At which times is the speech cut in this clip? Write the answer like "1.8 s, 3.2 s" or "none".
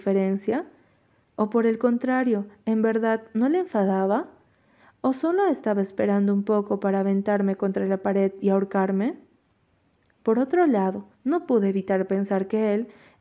11.1 s